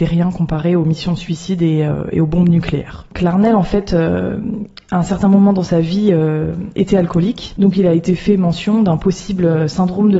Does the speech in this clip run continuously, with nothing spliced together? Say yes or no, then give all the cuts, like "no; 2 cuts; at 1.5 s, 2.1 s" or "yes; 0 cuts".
yes; 0 cuts